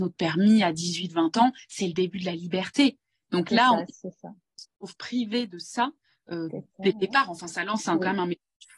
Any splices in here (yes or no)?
no